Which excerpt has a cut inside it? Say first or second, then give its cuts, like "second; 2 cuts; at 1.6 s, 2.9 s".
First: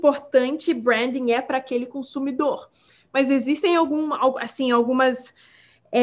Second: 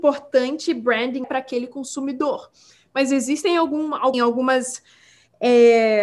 second; 2 cuts; at 1.2 s, 4.1 s